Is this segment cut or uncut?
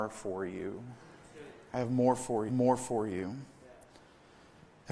cut